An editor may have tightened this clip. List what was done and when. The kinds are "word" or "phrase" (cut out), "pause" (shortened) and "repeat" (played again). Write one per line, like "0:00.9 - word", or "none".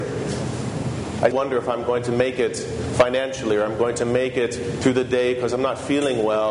0:01.3 - word